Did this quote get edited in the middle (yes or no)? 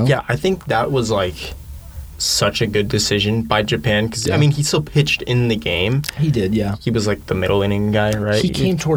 no